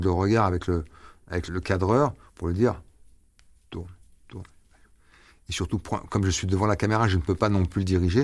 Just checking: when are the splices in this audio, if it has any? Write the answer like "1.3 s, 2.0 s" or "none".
1.5 s